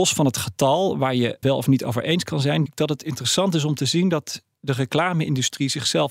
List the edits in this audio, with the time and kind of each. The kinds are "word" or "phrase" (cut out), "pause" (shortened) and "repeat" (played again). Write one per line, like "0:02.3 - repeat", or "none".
0:01.4 - word
0:02.7 - word